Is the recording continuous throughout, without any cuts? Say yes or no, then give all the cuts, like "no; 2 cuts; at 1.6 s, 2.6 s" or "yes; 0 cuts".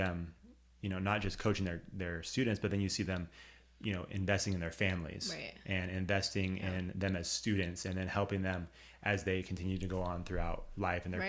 yes; 0 cuts